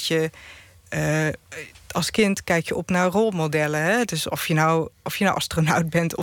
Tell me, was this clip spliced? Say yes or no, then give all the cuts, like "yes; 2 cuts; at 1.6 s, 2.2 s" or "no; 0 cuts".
no; 0 cuts